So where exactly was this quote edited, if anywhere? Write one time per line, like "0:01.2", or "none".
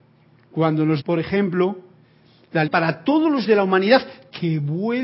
0:01.0
0:02.7
0:03.4

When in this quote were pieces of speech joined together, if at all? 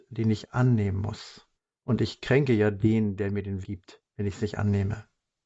0:01.6
0:03.6
0:04.1

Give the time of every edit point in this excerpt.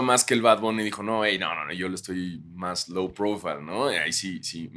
none

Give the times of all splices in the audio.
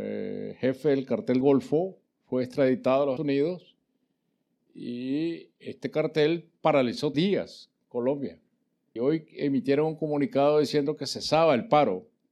0:01.4
0:02.1
0:03.2
0:05.6
0:07.1
0:09.0

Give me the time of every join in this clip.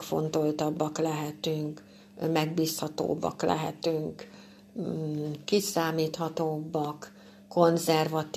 none

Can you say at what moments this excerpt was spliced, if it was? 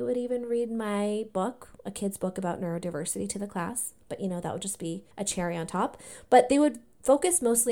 0:05.1

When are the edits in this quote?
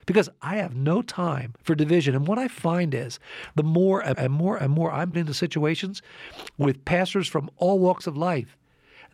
0:01.6
0:04.1
0:05.1

